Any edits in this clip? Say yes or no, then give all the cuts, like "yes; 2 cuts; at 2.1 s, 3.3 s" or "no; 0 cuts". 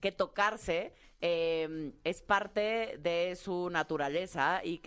no; 0 cuts